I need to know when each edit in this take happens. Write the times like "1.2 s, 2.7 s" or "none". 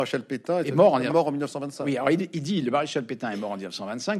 1.1 s